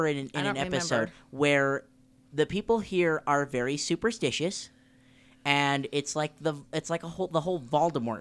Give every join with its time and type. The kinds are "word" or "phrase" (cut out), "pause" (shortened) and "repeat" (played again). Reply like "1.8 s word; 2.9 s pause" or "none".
none